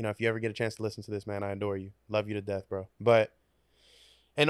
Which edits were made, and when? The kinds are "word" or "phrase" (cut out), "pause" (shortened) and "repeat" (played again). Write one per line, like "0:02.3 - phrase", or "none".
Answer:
0:02.0 - pause
0:02.9 - pause

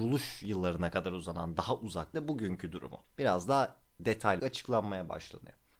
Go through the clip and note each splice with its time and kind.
0:02.1 - phrase
0:04.4 - word

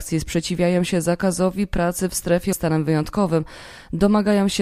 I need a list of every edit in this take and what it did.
0:02.5 - word

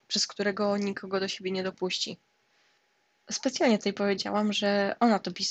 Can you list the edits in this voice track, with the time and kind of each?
none

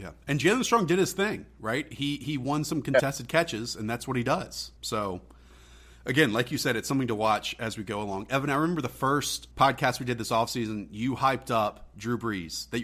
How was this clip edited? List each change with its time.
0:04.8 - pause
0:09.5 - pause

